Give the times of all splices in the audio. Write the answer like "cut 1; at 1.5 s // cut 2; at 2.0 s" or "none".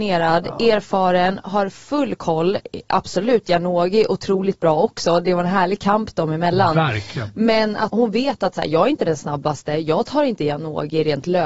cut 1; at 7.9 s